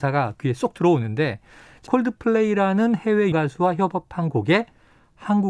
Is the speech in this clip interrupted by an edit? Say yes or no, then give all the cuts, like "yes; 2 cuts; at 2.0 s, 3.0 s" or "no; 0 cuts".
yes; 2 cuts; at 1.9 s, 3.3 s